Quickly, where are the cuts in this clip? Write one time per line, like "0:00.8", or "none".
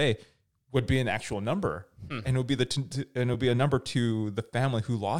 none

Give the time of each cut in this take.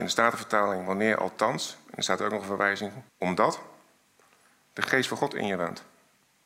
0:03.1

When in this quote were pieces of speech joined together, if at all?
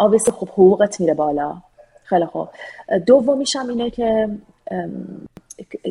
none

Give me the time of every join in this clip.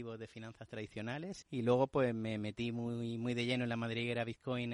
0:01.4

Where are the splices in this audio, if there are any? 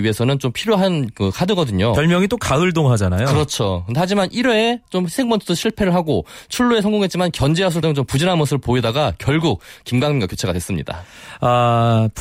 0:07.8

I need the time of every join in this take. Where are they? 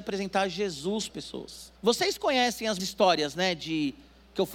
0:01.1
0:01.8
0:02.8

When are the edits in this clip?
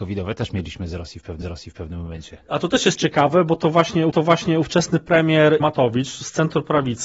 0:01.4
0:04.1
0:05.6

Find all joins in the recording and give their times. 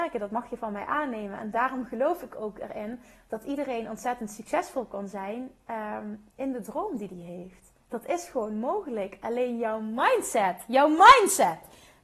0:06.3
0:07.8

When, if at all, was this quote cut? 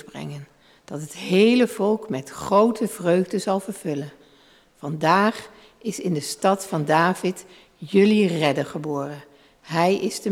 none

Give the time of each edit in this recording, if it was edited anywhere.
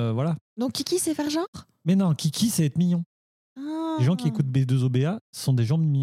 none

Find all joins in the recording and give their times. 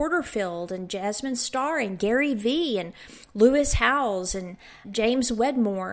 0:03.2
0:04.8

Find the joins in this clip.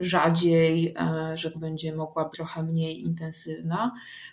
0:01.5
0:02.3

